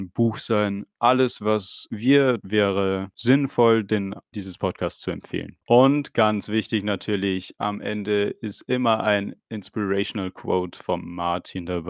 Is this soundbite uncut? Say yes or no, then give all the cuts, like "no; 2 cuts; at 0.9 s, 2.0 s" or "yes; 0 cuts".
no; 2 cuts; at 2.4 s, 4.3 s